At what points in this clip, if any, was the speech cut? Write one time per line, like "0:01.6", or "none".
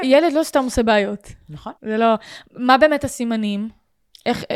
0:01.8